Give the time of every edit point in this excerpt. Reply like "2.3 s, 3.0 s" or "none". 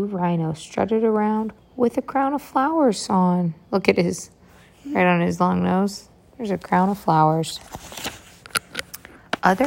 1.6 s